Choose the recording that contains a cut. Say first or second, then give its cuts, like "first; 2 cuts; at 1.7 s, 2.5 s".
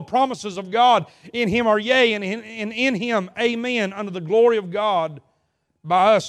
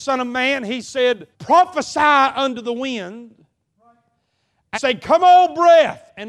second; 2 cuts; at 1.3 s, 4.7 s